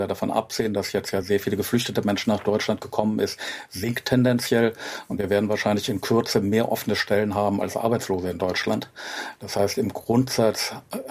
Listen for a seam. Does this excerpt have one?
no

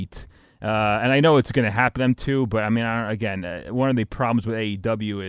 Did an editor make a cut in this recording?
yes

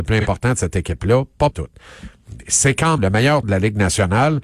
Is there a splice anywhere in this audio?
yes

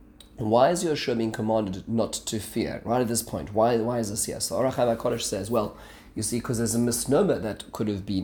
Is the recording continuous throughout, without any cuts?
yes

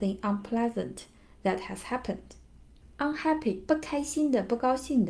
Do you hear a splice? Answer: no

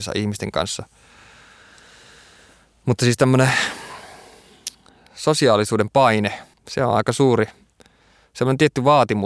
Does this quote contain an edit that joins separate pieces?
yes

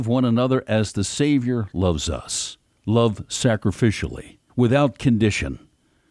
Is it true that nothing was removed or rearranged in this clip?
no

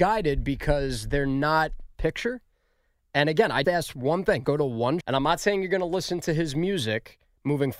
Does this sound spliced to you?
yes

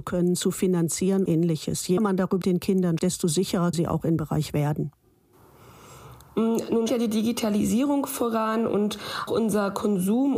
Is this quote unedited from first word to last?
no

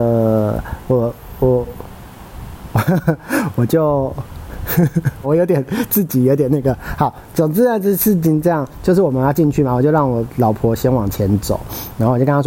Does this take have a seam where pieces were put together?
yes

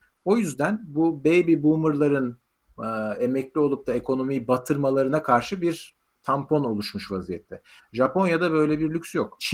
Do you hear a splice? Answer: no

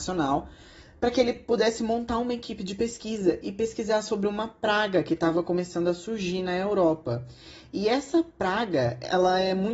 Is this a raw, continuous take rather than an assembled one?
yes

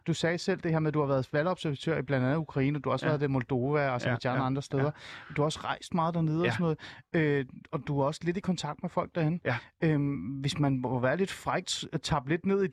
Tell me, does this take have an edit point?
yes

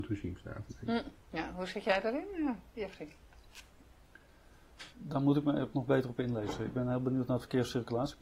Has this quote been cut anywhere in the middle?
yes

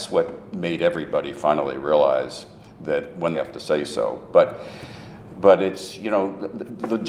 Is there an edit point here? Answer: yes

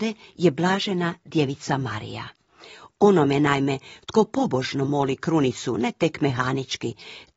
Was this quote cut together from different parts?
no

